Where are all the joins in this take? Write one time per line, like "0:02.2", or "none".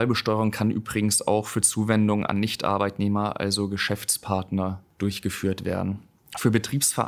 none